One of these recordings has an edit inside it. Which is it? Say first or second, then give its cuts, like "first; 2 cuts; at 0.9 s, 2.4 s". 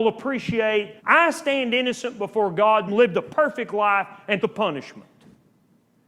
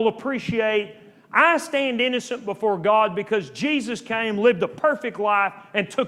first; 3 cuts; at 1.0 s, 2.9 s, 4.4 s